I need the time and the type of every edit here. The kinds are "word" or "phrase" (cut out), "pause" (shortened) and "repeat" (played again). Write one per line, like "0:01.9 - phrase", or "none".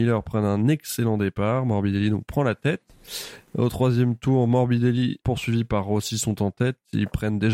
0:05.2 - word

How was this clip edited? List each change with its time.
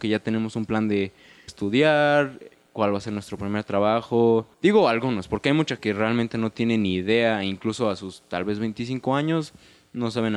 0:01.5 - phrase
0:04.5 - pause
0:05.8 - word

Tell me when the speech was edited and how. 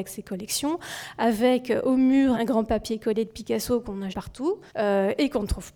0:02.3 - word
0:04.1 - word
0:04.7 - pause

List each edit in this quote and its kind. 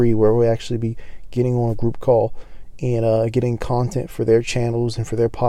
none

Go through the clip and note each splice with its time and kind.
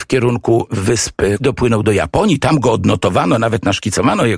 0:01.4 - phrase

